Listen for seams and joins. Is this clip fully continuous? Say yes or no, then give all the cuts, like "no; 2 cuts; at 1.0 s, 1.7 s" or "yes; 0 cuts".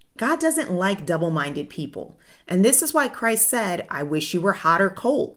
yes; 0 cuts